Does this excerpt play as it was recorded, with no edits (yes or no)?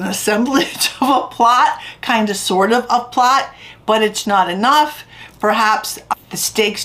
no